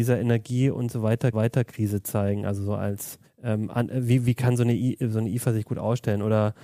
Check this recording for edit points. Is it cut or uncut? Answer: cut